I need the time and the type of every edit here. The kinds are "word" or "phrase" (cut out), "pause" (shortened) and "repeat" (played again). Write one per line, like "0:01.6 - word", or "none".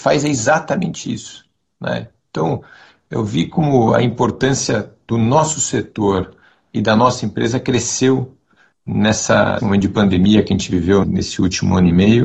0:09.6 - word
0:11.0 - word